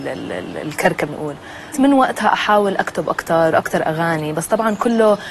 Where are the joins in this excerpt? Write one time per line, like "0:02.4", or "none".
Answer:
0:01.1
0:01.7
0:03.5